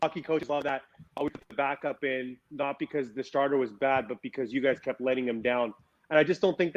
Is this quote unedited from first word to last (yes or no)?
no